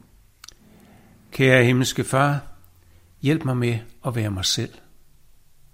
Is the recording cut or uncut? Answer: uncut